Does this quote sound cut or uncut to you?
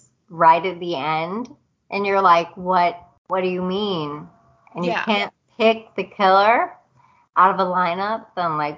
uncut